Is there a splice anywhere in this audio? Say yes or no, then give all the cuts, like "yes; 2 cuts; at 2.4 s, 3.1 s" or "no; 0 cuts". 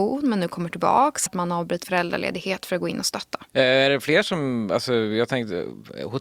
yes; 2 cuts; at 1.3 s, 1.8 s